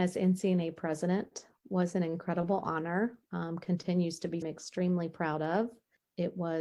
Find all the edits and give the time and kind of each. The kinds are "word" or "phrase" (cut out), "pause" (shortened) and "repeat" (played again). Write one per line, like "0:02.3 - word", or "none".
0:03.2 - pause
0:04.4 - phrase